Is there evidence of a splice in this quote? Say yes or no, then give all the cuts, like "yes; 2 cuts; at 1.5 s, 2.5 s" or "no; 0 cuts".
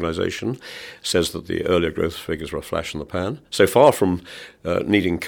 no; 0 cuts